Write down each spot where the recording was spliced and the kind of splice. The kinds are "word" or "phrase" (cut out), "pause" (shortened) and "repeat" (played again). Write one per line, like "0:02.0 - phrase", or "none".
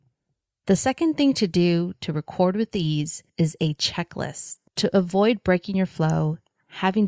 0:03.3 - pause
0:04.7 - pause